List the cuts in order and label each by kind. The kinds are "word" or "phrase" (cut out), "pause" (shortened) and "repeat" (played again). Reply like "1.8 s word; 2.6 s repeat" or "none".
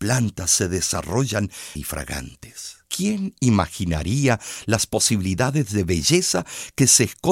1.8 s word; 2.8 s pause